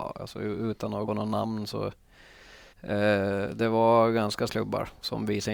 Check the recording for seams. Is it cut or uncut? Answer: cut